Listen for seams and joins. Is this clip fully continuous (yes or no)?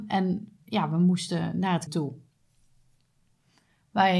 no